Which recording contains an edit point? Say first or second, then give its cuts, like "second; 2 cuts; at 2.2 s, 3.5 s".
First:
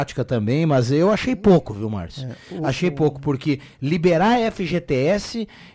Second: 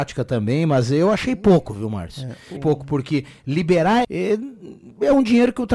second; 2 cuts; at 2.6 s, 4.0 s